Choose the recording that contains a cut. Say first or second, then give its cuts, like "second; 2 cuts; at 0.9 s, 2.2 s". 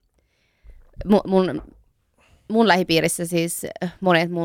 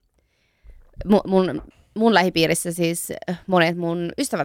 second; 1 cut; at 1.7 s